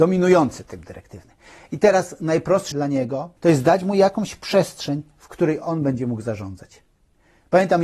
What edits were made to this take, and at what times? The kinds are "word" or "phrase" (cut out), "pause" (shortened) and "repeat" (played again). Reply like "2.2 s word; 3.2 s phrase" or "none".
2.7 s word; 3.4 s pause